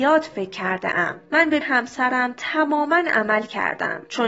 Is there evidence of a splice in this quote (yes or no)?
yes